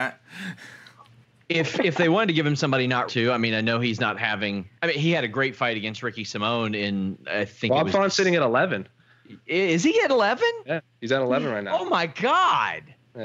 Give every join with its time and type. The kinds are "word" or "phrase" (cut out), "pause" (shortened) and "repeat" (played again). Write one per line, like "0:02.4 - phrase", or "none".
0:03.1 - phrase
0:04.8 - pause